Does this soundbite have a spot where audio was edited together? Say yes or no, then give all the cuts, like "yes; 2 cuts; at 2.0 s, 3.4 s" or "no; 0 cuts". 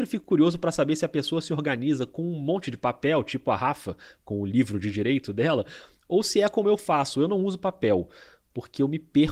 no; 0 cuts